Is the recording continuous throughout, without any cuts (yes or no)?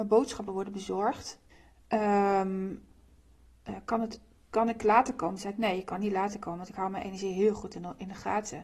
no